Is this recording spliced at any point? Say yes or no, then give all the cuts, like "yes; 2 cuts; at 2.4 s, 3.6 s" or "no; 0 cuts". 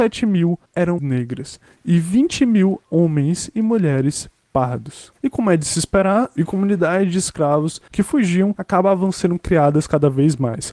yes; 3 cuts; at 1.0 s, 2.9 s, 6.4 s